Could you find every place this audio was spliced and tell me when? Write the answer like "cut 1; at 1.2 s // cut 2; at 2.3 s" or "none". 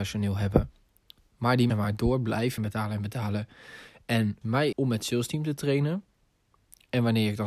cut 1; at 1.7 s // cut 2; at 2.6 s // cut 3; at 4.4 s // cut 4; at 4.7 s